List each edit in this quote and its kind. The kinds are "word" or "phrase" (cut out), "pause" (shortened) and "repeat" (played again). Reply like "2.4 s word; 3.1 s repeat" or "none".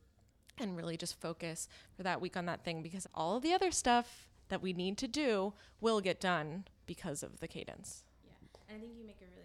3.0 s phrase; 6.8 s pause